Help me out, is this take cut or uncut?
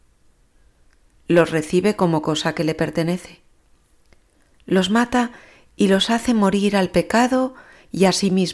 uncut